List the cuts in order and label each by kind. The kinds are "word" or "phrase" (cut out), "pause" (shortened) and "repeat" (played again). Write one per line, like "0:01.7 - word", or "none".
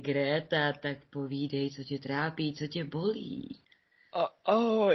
none